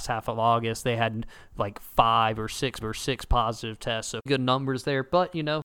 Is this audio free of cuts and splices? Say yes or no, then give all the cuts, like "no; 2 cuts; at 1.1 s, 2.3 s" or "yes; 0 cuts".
no; 2 cuts; at 2.8 s, 4.3 s